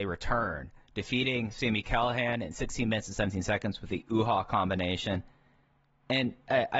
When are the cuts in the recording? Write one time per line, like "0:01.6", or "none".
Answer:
none